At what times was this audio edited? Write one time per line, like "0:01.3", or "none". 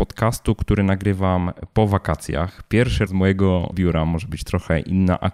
0:03.1
0:03.7